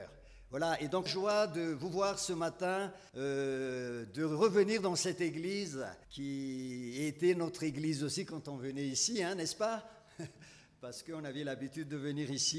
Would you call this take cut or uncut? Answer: cut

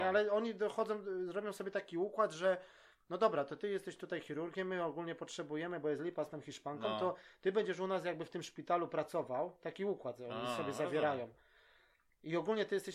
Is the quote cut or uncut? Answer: uncut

